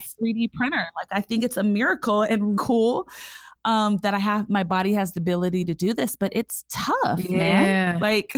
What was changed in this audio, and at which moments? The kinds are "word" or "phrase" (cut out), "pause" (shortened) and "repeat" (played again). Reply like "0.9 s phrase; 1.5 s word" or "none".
2.6 s word